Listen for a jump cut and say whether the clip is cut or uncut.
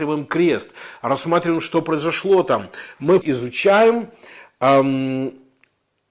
cut